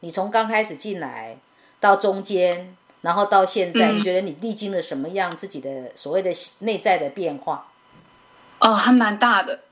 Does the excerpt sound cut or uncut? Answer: uncut